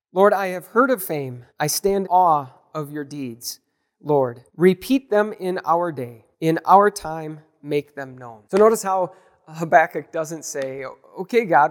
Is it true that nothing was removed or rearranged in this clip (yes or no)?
no